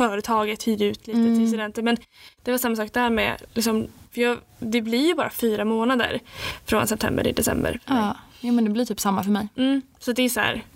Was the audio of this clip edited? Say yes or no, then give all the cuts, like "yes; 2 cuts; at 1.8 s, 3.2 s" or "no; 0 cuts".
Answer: no; 0 cuts